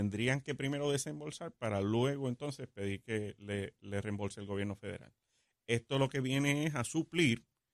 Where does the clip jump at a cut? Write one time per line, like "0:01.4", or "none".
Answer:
none